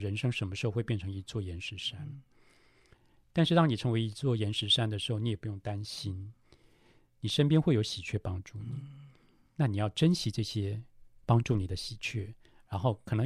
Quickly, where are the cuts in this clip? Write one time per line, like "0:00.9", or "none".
none